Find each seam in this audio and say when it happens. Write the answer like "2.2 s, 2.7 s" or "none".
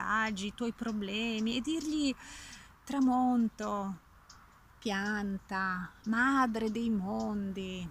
none